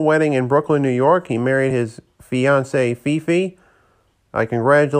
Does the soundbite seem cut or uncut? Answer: uncut